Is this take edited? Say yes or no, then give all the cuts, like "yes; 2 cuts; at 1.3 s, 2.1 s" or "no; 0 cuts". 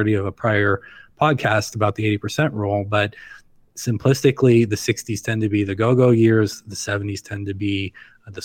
no; 0 cuts